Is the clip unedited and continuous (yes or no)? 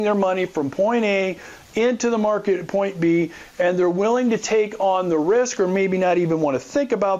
yes